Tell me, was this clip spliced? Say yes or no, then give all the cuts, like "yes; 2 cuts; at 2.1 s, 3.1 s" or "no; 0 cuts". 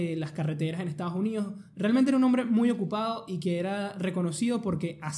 no; 0 cuts